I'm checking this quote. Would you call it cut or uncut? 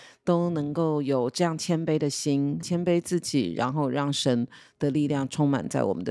cut